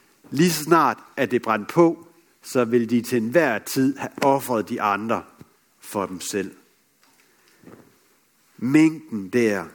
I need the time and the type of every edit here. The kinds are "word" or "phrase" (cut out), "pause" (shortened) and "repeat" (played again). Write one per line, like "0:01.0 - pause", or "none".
none